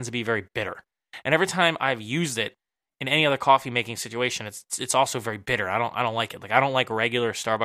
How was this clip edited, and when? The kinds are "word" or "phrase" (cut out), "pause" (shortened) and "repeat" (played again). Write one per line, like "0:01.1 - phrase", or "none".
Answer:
none